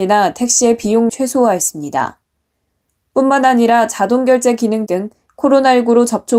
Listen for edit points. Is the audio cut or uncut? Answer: cut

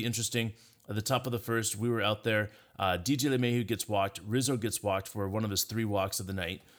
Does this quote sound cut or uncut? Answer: uncut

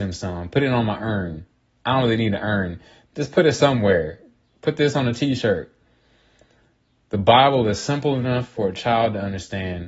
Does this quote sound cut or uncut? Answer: uncut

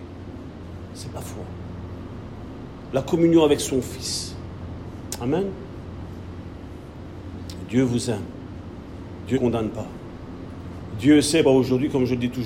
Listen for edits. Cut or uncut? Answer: cut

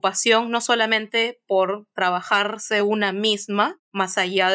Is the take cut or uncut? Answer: uncut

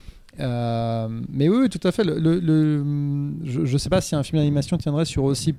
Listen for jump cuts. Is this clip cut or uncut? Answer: uncut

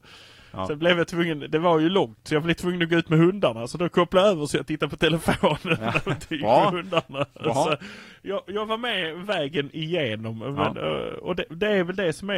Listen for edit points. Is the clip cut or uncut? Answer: uncut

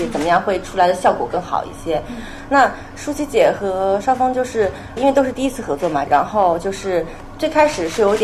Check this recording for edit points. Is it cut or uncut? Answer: cut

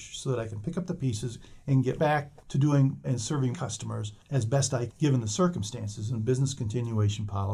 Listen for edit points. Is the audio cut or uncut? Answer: cut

